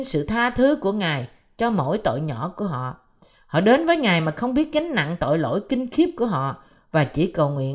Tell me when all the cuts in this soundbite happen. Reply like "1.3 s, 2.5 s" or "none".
none